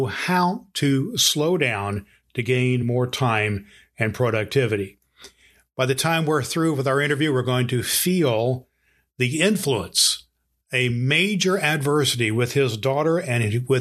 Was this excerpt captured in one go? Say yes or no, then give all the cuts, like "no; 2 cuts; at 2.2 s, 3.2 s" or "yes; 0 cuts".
yes; 0 cuts